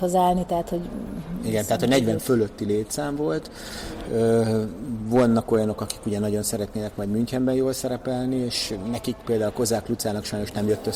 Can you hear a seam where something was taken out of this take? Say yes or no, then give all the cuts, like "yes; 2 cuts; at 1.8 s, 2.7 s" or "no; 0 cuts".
yes; 1 cut; at 9.2 s